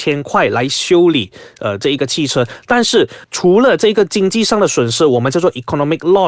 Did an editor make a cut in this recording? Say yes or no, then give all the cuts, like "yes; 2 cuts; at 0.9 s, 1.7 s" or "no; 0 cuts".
no; 0 cuts